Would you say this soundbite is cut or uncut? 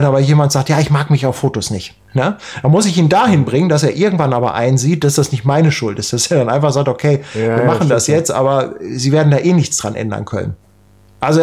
cut